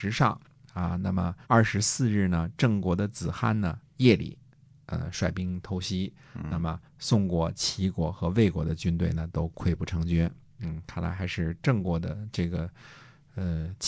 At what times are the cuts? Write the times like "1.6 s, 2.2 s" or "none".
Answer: 1.4 s, 6.9 s